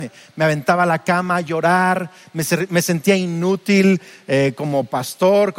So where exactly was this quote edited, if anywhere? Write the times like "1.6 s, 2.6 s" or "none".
none